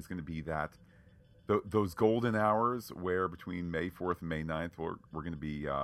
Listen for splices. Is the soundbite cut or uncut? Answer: uncut